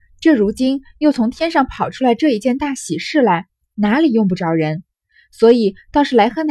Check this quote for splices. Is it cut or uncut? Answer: uncut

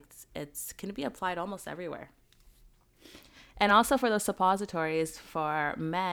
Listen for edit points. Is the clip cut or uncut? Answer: uncut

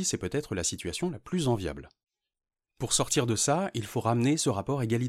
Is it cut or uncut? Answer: uncut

